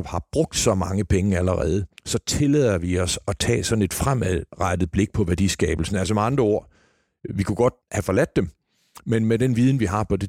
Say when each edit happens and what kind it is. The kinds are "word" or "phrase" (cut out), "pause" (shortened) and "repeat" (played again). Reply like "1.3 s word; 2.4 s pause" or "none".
2.0 s pause; 7.8 s pause